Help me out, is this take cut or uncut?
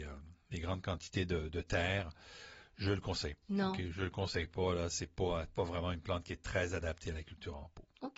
cut